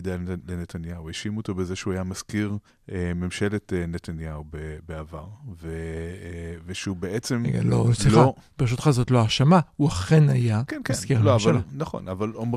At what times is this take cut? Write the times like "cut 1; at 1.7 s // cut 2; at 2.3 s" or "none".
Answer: cut 1; at 2.7 s // cut 2; at 10.7 s